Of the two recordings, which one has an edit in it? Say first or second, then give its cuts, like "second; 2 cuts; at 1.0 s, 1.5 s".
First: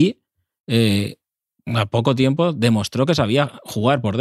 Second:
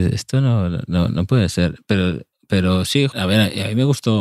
second; 1 cut; at 3.1 s